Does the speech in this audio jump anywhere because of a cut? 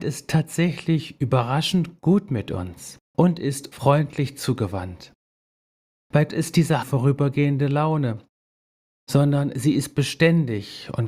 yes; 4 cuts; at 3.1 s, 3.7 s, 6.3 s, 6.8 s

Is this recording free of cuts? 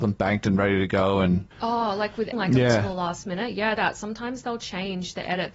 no; 3 cuts; at 1.5 s, 2.3 s, 3.8 s

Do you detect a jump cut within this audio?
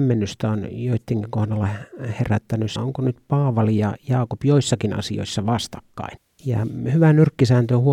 yes; 1 cut; at 2.8 s

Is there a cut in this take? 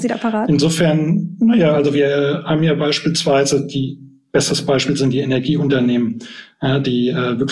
no; 0 cuts

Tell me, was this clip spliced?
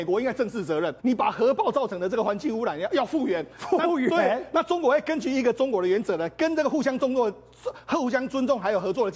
yes; 1 cut; at 1.0 s

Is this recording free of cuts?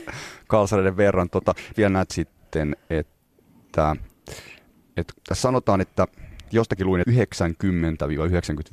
no; 4 cuts; at 1.7 s, 2.1 s, 5.1 s, 7.0 s

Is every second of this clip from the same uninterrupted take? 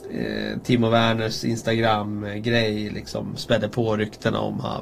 yes; 0 cuts

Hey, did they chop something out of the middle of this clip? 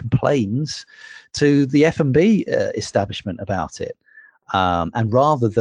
no; 0 cuts

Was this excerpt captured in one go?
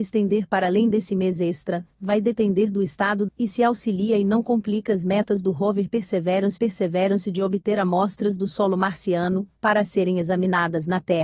no; 2 cuts; at 3.3 s, 6.6 s

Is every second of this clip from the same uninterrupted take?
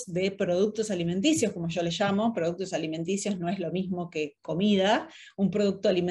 yes; 0 cuts

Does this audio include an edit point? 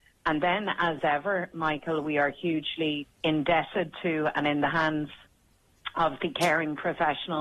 yes; 1 cut; at 3.1 s

